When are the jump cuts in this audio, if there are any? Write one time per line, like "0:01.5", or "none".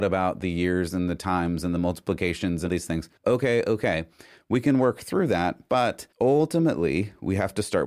0:02.7
0:03.2
0:06.1